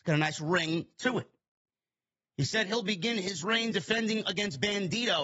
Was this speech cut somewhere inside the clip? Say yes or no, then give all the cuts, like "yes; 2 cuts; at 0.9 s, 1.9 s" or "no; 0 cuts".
no; 0 cuts